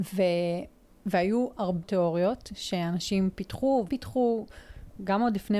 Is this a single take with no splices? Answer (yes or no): no